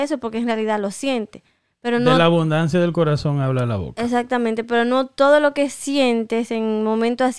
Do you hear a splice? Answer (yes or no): no